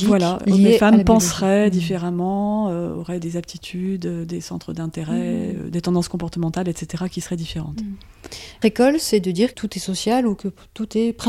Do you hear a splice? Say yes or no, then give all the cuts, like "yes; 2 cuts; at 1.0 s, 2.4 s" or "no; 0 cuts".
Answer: yes; 2 cuts; at 8.6 s, 9.5 s